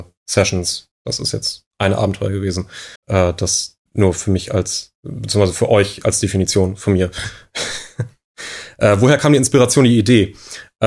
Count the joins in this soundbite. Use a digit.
3